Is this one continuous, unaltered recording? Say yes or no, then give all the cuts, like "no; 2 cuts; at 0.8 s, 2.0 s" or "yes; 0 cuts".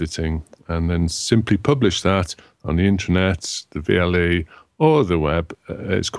yes; 0 cuts